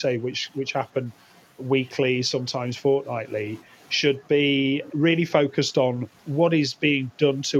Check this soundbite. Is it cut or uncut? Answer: cut